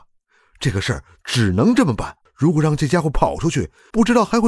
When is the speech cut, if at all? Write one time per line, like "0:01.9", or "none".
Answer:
0:02.2